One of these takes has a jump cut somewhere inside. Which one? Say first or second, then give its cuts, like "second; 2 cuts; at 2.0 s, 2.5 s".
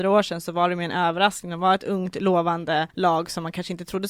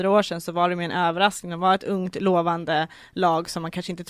first; 1 cut; at 2.9 s